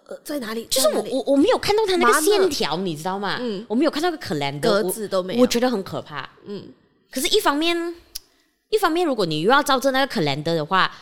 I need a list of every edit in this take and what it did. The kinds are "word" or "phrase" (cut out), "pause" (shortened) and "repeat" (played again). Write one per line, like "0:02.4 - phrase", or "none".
none